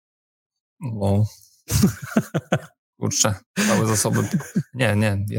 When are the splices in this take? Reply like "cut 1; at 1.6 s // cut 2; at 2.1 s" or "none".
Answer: none

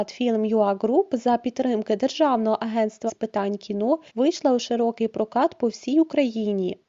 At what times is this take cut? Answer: cut 1; at 3.1 s // cut 2; at 4.1 s

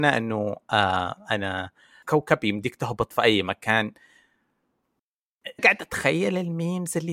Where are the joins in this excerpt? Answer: cut 1; at 2.0 s // cut 2; at 5.6 s

